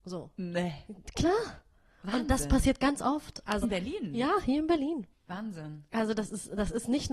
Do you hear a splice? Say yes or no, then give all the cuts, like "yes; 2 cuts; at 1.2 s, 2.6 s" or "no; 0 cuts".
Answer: yes; 2 cuts; at 3.6 s, 5.1 s